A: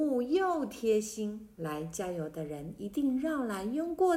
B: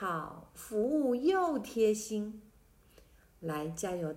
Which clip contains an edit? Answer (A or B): A